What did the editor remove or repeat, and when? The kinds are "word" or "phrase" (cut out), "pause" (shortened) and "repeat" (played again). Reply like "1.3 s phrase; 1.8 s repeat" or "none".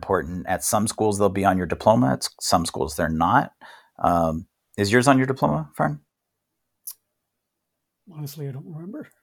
none